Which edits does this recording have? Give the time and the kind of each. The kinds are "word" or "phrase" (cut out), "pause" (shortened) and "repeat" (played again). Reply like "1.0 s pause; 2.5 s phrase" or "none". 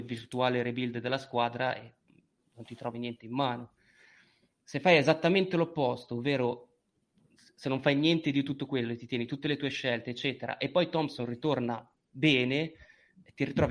none